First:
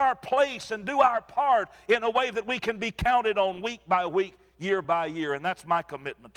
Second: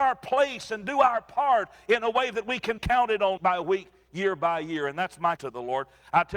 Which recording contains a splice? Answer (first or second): second